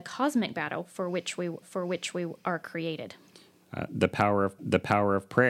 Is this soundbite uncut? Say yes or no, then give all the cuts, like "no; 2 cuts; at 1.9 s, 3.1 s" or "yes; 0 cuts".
no; 2 cuts; at 1.6 s, 4.6 s